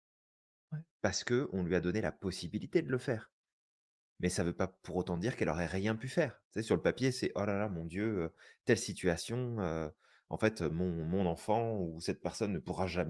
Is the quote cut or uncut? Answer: uncut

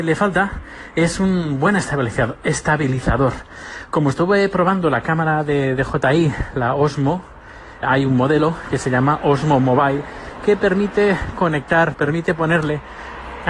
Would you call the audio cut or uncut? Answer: cut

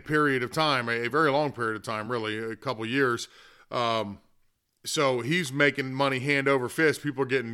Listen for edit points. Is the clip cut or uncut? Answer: uncut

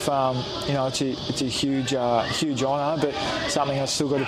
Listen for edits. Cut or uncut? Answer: uncut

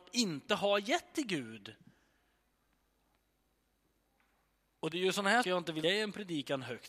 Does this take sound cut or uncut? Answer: cut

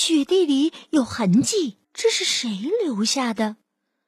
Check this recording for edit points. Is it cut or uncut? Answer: cut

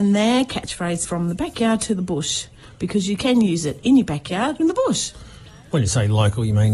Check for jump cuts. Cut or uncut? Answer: cut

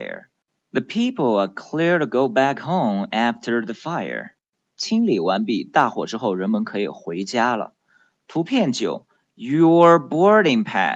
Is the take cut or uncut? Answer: uncut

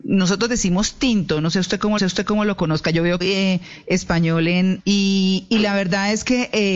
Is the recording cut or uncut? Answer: cut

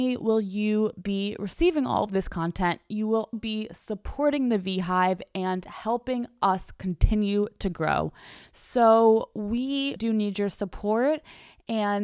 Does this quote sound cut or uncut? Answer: cut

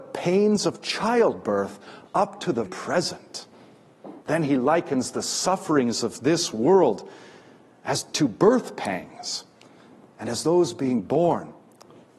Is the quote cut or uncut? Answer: cut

